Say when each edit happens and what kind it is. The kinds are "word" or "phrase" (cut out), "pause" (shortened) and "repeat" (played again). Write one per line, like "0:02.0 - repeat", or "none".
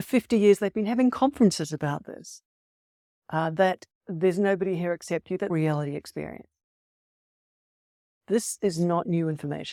0:04.0 - pause
0:05.5 - phrase